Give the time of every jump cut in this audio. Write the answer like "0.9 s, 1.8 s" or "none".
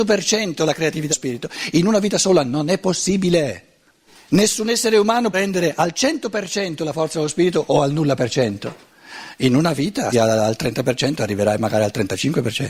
1.1 s, 4.1 s, 5.3 s, 10.1 s